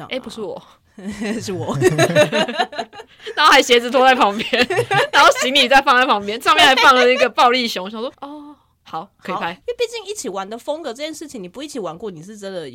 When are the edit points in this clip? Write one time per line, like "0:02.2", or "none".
0:08.1

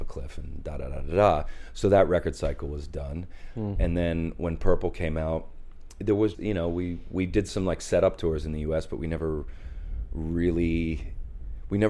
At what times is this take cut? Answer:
0:06.3

